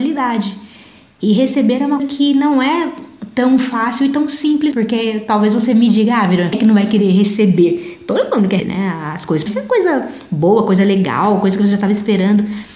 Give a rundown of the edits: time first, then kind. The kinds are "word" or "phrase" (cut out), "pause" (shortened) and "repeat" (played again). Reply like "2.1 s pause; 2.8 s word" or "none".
2.0 s word; 4.7 s word; 6.5 s word; 8.6 s word; 9.5 s word